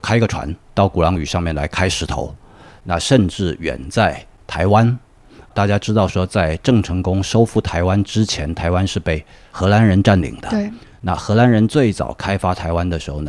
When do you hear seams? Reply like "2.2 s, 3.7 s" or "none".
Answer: none